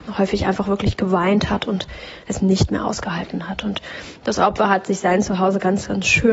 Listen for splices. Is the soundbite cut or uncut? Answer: uncut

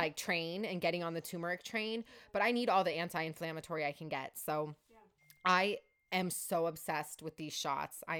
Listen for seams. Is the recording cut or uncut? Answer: uncut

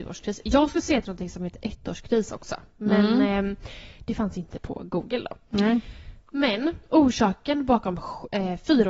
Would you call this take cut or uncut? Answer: cut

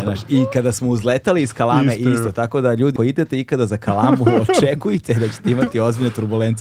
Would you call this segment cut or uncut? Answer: cut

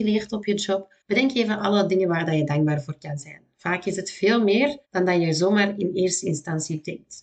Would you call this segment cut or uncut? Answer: cut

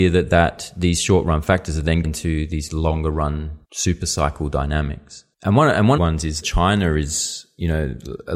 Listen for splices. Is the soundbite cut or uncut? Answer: cut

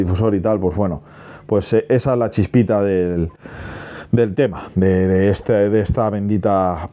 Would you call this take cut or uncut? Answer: uncut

